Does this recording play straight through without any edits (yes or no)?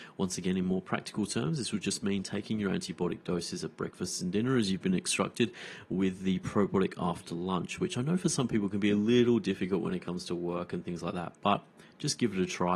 yes